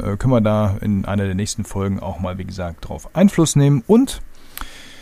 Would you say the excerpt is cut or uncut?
uncut